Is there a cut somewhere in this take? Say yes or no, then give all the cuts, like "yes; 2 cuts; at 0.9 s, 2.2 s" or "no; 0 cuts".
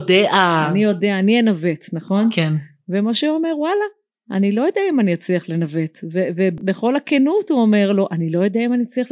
no; 0 cuts